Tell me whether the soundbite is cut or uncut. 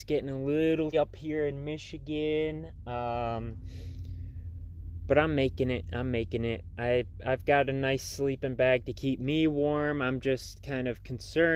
cut